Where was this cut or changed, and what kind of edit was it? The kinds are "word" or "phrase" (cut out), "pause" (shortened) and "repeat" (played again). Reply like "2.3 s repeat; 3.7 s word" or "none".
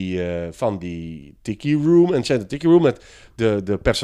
none